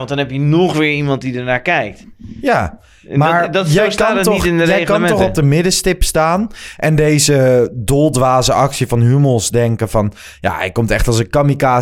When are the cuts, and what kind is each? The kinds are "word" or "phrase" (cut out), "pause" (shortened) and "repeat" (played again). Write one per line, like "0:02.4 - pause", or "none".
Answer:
none

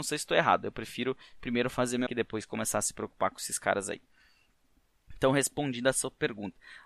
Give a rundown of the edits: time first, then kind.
0:02.1 - word

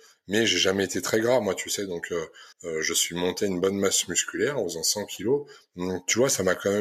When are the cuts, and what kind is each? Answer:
0:02.5 - pause

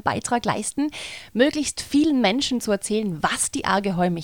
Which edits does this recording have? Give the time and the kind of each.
none

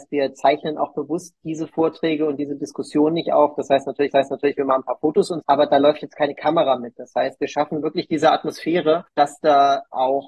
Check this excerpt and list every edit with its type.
0:04.1 - repeat
0:05.4 - word

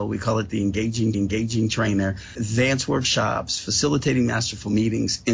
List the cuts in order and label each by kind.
0:01.1 - repeat

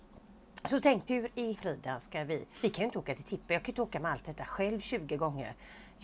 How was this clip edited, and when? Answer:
0:01.1 - word
0:01.5 - word
0:02.5 - pause

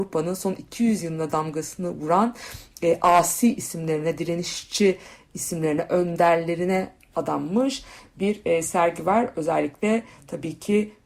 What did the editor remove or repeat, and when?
none

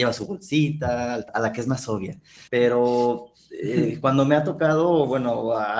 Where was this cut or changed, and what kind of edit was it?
0:01.3 - word
0:02.5 - pause

